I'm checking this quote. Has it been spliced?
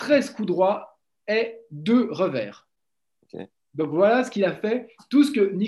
no; 0 cuts

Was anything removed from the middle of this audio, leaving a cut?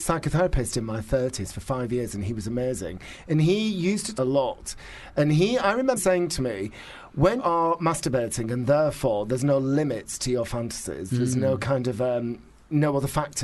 yes; 3 cuts; at 4.1 s, 6.0 s, 7.4 s

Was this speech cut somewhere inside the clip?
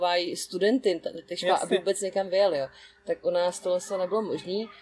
no; 0 cuts

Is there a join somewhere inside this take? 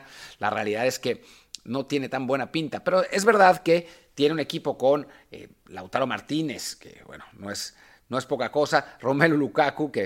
no; 0 cuts

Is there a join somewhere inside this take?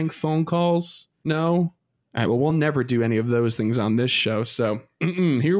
no; 0 cuts

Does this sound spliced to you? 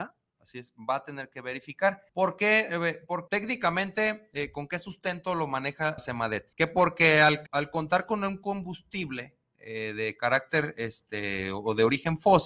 yes; 5 cuts; at 2.1 s, 3.3 s, 6.0 s, 6.5 s, 7.5 s

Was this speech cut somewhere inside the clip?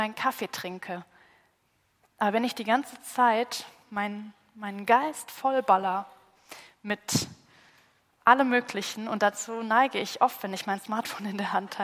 no; 0 cuts

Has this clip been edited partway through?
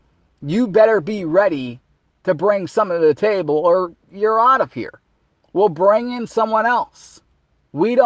no; 0 cuts

